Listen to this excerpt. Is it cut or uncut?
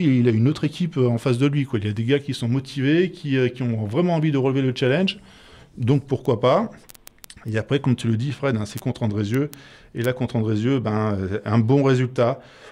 uncut